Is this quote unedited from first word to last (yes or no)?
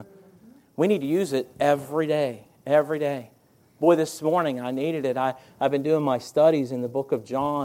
no